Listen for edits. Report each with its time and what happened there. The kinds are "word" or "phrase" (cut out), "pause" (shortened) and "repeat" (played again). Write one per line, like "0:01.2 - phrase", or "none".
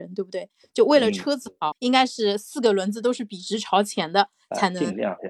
0:01.7 - word